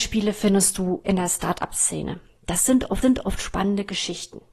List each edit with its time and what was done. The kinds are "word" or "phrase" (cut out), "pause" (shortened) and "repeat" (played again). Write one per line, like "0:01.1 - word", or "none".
0:01.0 - word
0:03.0 - repeat